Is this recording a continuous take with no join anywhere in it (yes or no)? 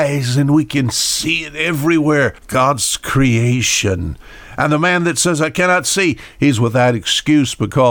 no